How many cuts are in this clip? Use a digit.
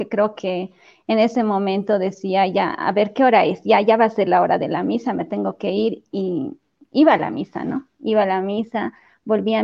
0